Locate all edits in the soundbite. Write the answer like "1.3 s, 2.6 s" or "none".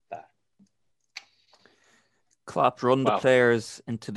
2.8 s

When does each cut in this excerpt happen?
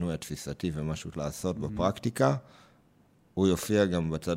1.1 s

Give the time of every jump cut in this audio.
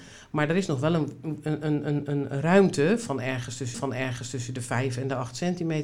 3.7 s

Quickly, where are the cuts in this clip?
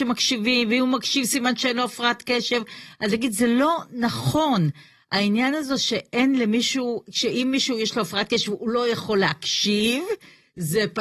none

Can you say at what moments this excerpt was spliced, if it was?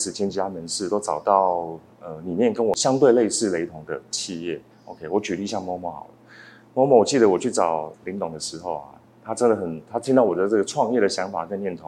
4.7 s, 7.9 s

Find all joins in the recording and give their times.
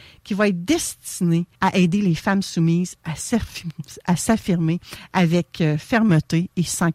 1.5 s

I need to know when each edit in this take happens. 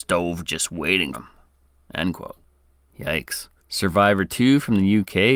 1.1 s, 3.6 s

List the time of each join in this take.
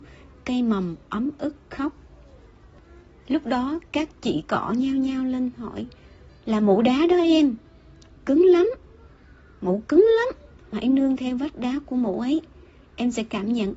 10.7 s

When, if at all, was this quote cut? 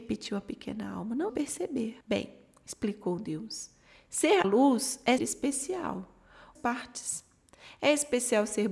1.3 s, 2.0 s, 4.4 s, 5.2 s, 6.6 s

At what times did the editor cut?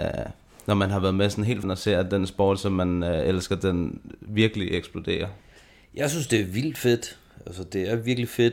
1.6 s

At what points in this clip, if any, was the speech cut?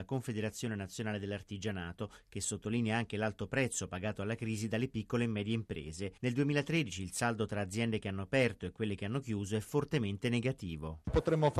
none

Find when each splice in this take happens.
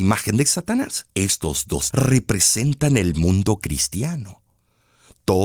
1.1 s, 1.9 s

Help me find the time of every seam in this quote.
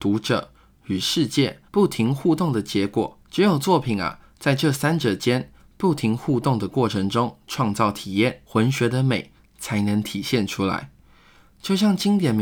1.7 s, 3.2 s, 8.5 s

